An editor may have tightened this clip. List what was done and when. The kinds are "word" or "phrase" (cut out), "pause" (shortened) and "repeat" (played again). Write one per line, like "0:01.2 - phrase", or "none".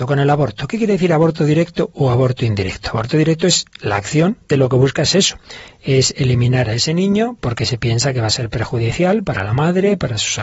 0:04.5 - word
0:07.4 - word

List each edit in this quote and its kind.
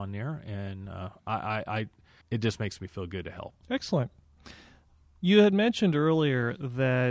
0:02.2 - pause
0:03.6 - pause

